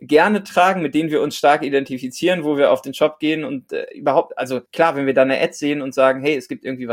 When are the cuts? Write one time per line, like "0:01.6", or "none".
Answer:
0:04.7